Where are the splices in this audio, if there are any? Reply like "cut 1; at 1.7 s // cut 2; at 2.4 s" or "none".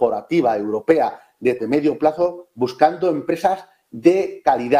cut 1; at 1.6 s